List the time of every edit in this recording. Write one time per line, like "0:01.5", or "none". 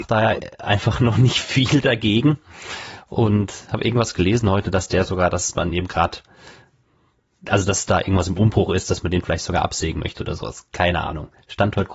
none